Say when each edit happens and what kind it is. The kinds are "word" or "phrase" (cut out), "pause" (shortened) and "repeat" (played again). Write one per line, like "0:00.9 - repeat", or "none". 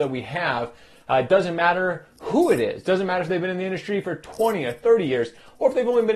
none

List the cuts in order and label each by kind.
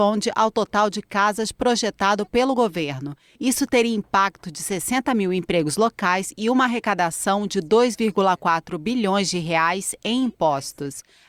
none

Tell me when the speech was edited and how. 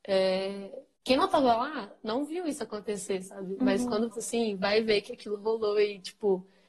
0:04.1 - phrase

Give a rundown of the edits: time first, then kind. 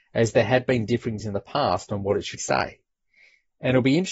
0:01.2 - word
0:02.4 - word

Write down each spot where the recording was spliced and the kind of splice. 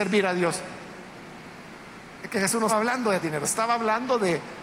0:02.7 - word
0:03.2 - word

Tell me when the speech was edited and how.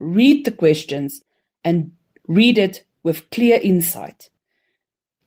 none

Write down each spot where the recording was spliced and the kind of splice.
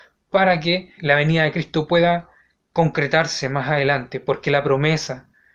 0:01.0 - word

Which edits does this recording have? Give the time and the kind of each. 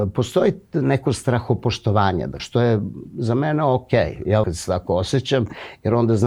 0:02.4 - word
0:04.4 - word

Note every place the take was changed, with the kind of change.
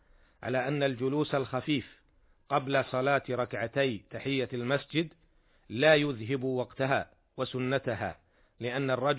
none

